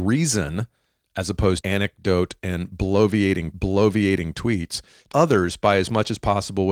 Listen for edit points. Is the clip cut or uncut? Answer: cut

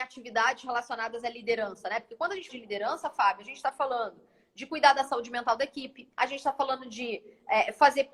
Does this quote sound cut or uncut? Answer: cut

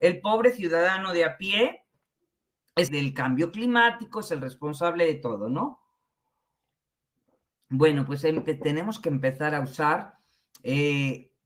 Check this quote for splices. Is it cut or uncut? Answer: cut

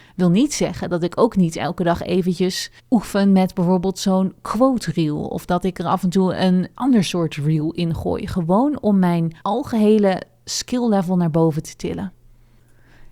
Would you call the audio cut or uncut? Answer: cut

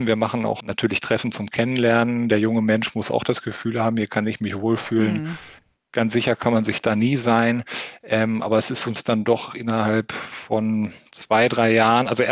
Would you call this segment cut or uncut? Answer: uncut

